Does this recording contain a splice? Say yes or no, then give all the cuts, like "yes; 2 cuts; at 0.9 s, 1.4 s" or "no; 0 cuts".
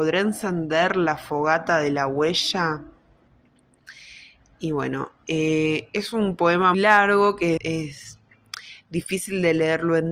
yes; 2 cuts; at 6.7 s, 7.6 s